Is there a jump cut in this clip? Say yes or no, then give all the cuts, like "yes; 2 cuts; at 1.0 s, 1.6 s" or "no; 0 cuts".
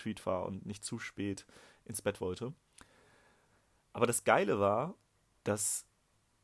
no; 0 cuts